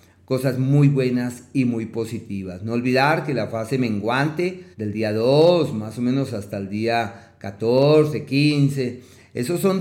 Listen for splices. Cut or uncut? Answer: cut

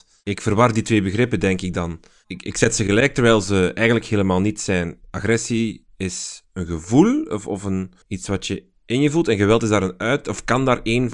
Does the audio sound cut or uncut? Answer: cut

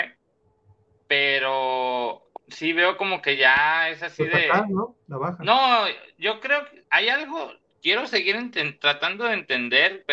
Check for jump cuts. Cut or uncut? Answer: cut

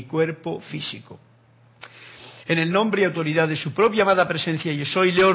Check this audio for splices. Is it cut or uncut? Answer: uncut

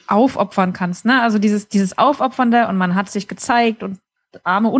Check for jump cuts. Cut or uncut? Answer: uncut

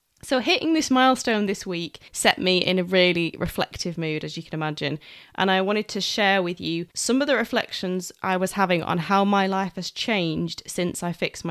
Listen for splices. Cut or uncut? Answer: cut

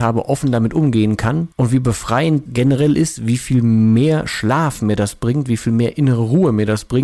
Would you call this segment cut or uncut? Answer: cut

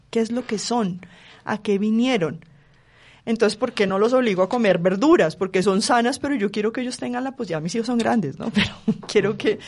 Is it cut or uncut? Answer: uncut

